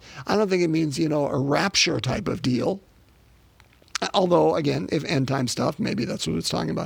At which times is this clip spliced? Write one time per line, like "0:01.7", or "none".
none